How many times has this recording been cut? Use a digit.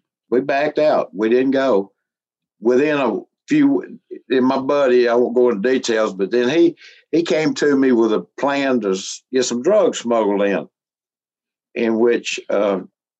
0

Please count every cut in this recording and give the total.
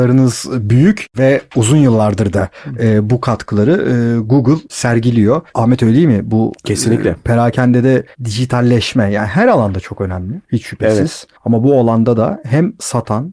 4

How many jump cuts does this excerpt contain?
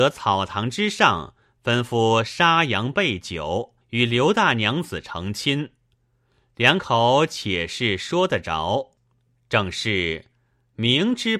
1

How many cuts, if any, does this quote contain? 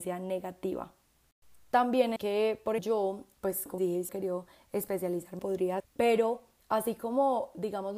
7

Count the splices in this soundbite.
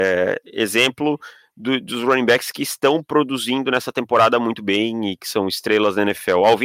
0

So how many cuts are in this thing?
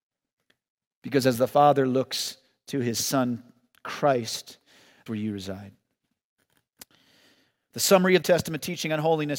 2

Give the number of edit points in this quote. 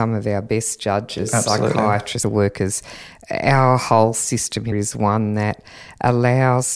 2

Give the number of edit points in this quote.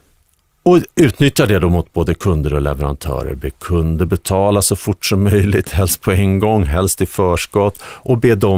0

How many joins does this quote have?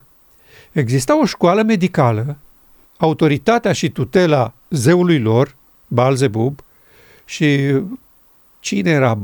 2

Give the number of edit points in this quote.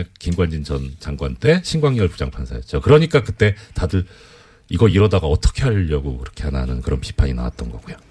0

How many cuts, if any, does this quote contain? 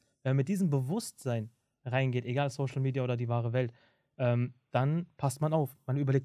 0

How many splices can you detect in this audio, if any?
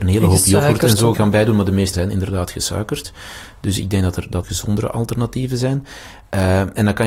3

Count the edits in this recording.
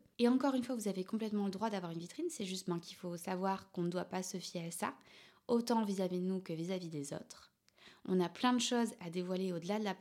0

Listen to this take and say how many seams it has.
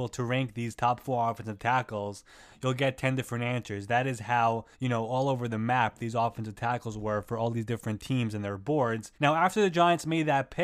2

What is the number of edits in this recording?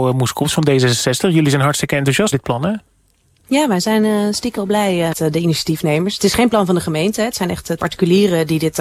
4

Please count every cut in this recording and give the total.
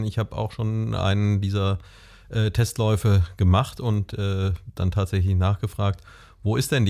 0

